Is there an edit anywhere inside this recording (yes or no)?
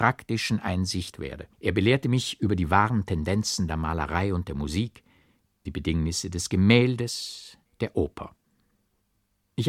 yes